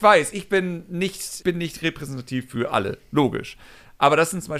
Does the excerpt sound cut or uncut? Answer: cut